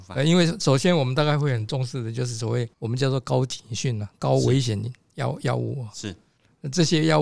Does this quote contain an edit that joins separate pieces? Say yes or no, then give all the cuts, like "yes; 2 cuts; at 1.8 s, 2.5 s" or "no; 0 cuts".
yes; 1 cut; at 2.7 s